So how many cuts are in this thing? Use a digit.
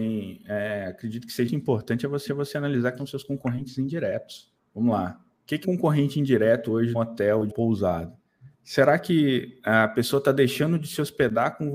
9